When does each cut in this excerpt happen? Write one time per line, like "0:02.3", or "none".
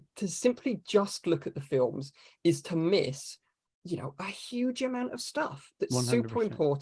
none